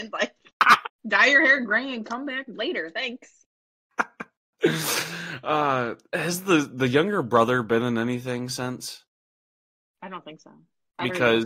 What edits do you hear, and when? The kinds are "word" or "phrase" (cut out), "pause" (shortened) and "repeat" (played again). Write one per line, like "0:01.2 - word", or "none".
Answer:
0:01.0 - pause